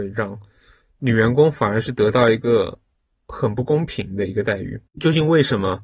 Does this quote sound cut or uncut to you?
cut